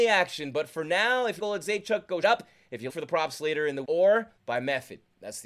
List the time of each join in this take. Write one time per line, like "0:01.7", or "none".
0:01.4
0:02.2
0:02.9
0:03.8
0:04.4